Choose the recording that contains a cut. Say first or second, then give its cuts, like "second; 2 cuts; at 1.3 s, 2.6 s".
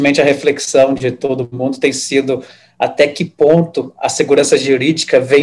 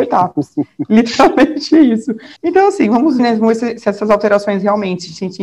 second; 2 cuts; at 2.4 s, 3.2 s